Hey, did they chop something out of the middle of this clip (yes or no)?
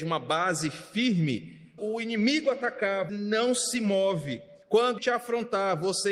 yes